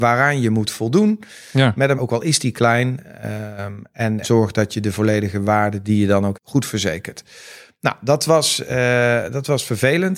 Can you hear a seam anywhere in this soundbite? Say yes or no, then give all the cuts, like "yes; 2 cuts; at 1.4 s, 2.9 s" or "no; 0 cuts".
yes; 3 cuts; at 2.0 s, 4.2 s, 6.3 s